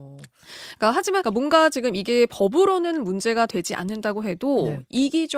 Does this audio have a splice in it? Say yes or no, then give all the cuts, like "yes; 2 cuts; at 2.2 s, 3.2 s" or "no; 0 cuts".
yes; 1 cut; at 1.2 s